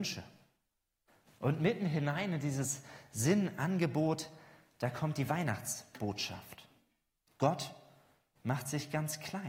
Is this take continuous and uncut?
yes; 0 cuts

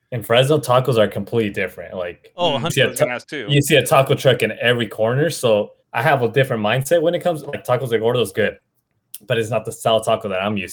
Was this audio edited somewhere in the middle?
yes; 2 cuts; at 2.7 s, 5.8 s

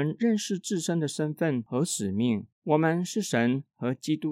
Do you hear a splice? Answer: yes; 1 cut; at 2.5 s

